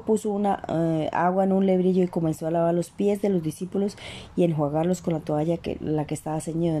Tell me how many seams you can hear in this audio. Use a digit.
0